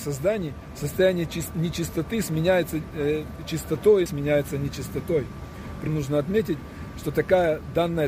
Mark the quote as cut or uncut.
cut